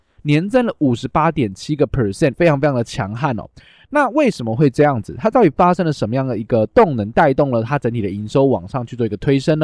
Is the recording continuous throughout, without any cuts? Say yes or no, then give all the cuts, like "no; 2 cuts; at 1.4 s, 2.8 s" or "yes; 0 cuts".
no; 1 cut; at 2.3 s